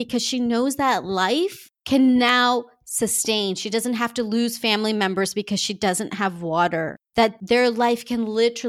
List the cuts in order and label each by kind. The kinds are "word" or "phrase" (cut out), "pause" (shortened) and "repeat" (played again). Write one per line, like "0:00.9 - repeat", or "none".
none